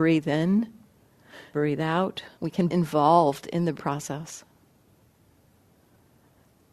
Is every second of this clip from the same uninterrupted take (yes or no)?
no